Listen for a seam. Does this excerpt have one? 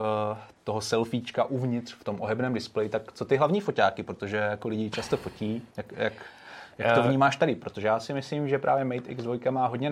yes; 1 cut; at 5.7 s

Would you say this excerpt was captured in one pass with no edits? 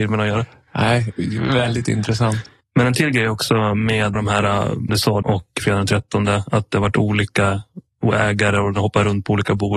no; 4 cuts; at 2.6 s, 4.2 s, 4.9 s, 5.2 s

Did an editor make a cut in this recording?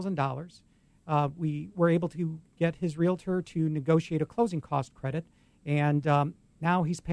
no; 0 cuts

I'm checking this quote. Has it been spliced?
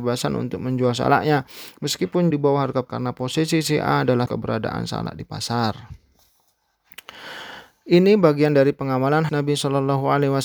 yes; 4 cuts; at 2.3 s, 2.9 s, 4.3 s, 9.3 s

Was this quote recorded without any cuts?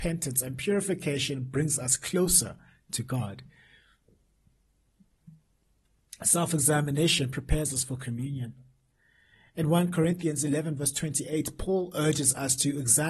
yes; 0 cuts

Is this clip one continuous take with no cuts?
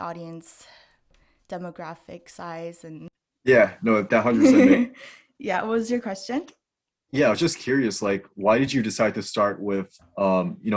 yes; 0 cuts

